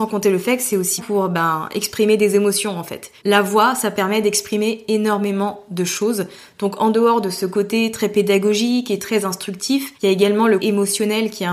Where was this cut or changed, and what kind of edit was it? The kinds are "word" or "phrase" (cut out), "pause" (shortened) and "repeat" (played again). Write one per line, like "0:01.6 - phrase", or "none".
0:01.0 - word
0:03.2 - pause
0:09.9 - pause
0:10.6 - word